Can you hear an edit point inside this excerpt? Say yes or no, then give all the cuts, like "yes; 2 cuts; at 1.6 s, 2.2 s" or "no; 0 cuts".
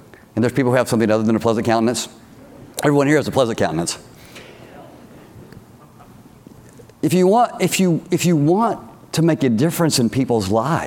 yes; 1 cut; at 2.7 s